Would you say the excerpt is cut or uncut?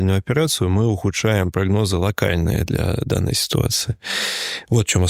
uncut